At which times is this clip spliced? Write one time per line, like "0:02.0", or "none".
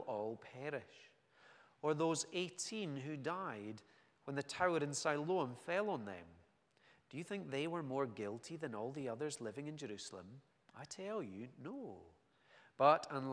none